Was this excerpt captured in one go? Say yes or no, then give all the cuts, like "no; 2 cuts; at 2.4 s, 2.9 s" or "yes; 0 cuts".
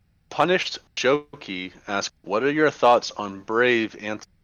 no; 1 cut; at 2.2 s